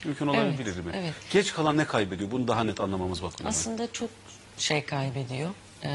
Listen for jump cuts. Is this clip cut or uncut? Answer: uncut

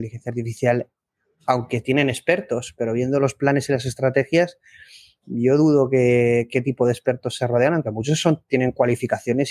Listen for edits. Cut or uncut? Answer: uncut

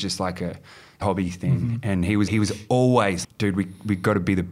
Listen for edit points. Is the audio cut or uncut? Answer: cut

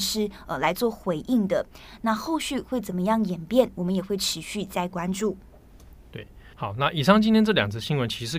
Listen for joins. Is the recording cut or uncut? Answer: cut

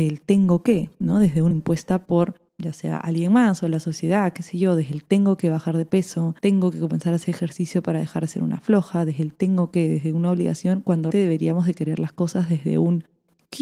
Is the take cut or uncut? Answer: cut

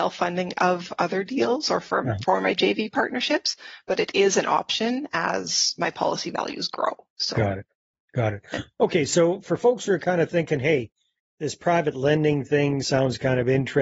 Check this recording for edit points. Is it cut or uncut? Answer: uncut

